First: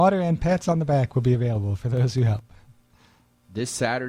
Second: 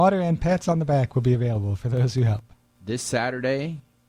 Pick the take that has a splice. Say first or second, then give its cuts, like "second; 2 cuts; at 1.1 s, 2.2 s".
second; 1 cut; at 2.5 s